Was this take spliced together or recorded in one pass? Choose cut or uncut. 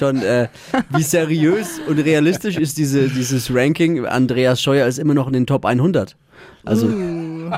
uncut